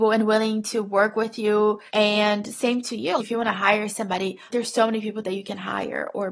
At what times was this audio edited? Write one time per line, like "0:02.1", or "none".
0:01.9
0:03.2
0:04.5